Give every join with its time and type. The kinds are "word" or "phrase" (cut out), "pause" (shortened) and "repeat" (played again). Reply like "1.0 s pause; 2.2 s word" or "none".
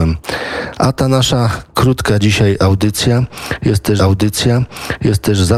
4.0 s repeat